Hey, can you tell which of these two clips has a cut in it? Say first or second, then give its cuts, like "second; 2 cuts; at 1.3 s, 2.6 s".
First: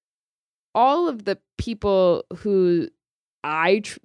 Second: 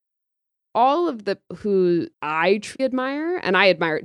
second; 3 cuts; at 1.5 s, 2.1 s, 2.8 s